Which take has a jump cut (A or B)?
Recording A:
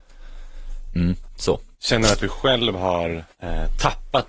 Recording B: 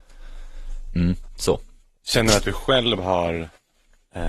A